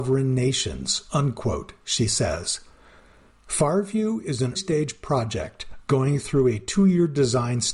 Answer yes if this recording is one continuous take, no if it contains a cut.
no